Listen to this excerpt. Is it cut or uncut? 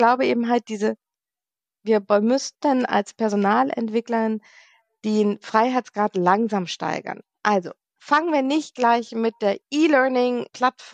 uncut